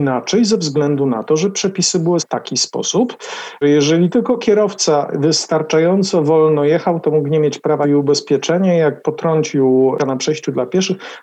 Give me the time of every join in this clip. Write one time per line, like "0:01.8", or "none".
0:02.2
0:03.6
0:07.8
0:10.0